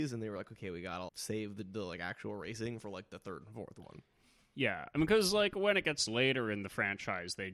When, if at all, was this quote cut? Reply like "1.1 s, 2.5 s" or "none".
1.1 s